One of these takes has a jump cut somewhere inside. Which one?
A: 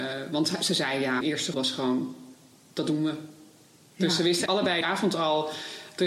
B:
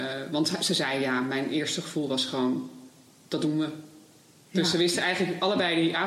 A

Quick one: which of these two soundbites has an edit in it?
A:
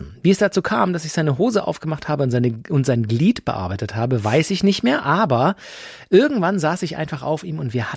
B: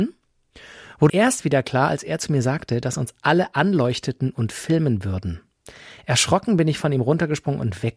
B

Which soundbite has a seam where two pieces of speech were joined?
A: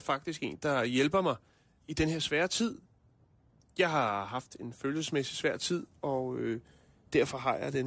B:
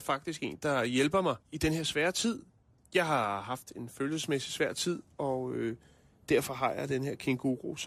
B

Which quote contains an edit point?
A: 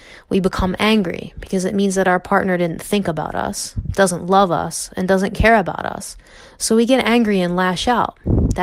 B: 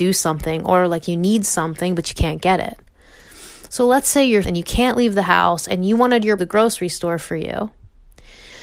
B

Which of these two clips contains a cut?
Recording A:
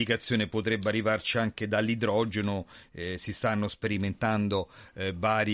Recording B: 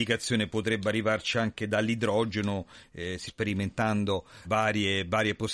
B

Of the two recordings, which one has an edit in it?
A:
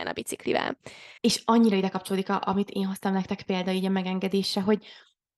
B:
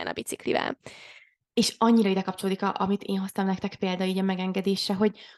A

